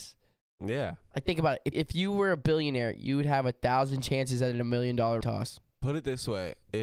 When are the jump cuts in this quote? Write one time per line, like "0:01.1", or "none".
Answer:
0:01.7
0:05.2